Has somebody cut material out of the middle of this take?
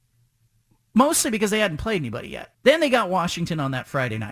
yes; 1 cut; at 2.5 s

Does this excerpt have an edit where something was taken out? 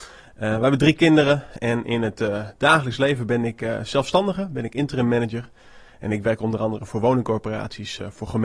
no; 0 cuts

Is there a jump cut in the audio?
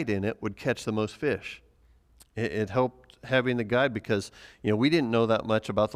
no; 0 cuts

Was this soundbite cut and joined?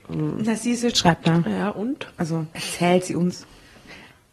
yes; 3 cuts; at 0.9 s, 1.2 s, 2.5 s

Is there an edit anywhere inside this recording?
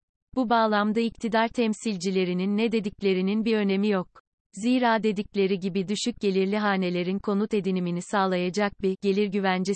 no; 0 cuts

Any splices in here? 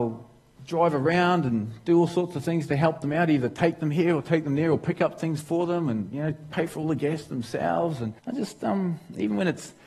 yes; 1 cut; at 8.2 s

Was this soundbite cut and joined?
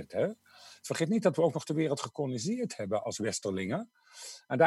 no; 0 cuts

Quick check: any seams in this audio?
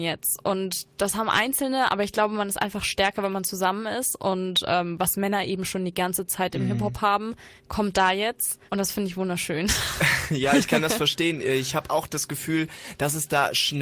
yes; 2 cuts; at 7.6 s, 8.7 s

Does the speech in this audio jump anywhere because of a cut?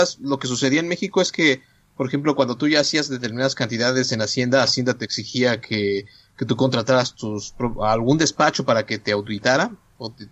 no; 0 cuts

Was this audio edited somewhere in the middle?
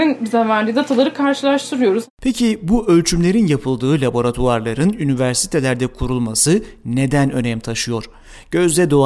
yes; 1 cut; at 2.1 s

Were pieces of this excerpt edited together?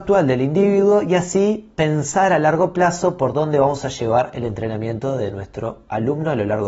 no; 0 cuts

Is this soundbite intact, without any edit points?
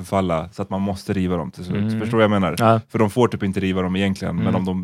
yes; 0 cuts

